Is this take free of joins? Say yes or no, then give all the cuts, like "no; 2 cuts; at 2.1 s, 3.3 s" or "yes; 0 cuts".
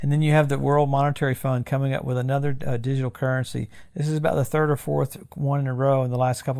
yes; 0 cuts